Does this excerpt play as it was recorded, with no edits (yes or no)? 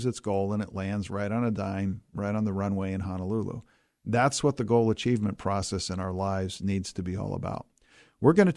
yes